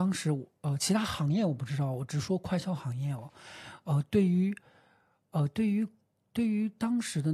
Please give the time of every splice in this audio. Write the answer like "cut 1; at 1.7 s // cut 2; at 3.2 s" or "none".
none